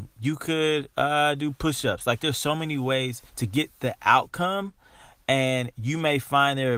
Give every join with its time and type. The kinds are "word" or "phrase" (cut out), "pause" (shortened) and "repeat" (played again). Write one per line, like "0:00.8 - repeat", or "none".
0:03.3 - pause